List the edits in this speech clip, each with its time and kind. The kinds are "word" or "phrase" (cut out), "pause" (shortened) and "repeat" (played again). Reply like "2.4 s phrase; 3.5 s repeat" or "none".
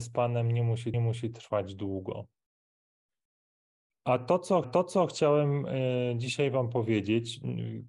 0.9 s repeat; 4.6 s repeat

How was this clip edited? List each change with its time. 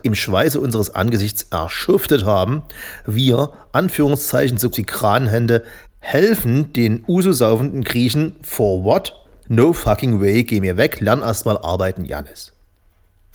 4.7 s word; 9.2 s pause

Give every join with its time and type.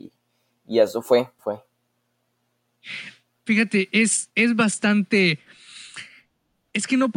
1.4 s word

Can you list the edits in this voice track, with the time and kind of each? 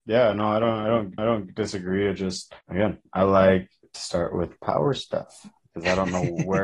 1.2 s repeat

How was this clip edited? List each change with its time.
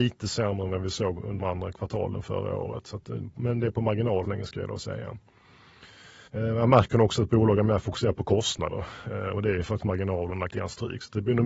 1.4 s word; 4.2 s phrase; 6.3 s pause; 9.8 s word; 10.5 s phrase

